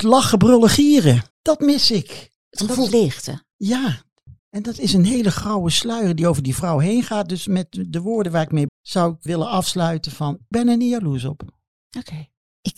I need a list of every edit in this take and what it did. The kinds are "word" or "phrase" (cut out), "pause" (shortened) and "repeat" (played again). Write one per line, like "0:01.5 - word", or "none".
0:01.3 - pause
0:02.4 - pause
0:02.9 - word
0:04.4 - pause
0:08.7 - phrase
0:09.3 - word
0:10.5 - word